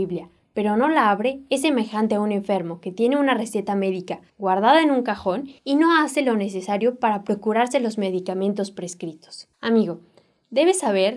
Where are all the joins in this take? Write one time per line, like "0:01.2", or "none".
0:04.3
0:05.6
0:09.5